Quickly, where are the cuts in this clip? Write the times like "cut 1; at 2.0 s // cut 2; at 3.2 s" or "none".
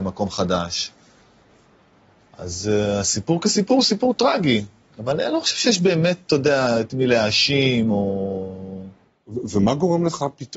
none

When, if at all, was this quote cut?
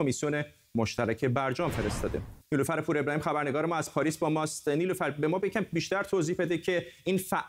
cut 1; at 2.4 s

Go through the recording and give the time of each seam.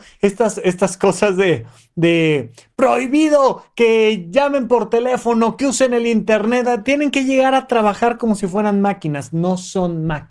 none

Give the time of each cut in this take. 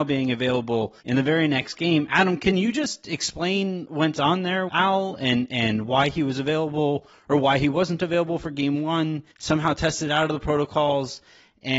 cut 1; at 1.0 s // cut 2; at 3.9 s // cut 3; at 4.7 s // cut 4; at 9.3 s

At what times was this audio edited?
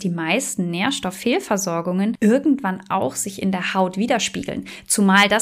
none

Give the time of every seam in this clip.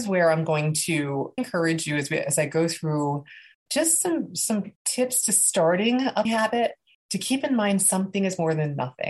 cut 1; at 1.4 s // cut 2; at 3.5 s // cut 3; at 4.8 s // cut 4; at 6.2 s // cut 5; at 6.9 s

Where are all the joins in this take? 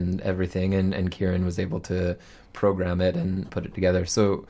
cut 1; at 3.5 s

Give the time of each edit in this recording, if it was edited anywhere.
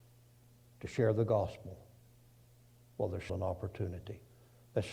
cut 1; at 3.3 s

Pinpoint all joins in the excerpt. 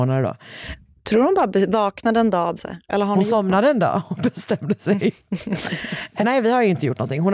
cut 1; at 2.6 s // cut 2; at 6.2 s

